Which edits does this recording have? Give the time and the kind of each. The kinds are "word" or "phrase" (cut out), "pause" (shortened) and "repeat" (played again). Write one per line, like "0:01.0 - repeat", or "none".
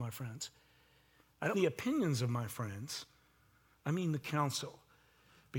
0:01.5 - word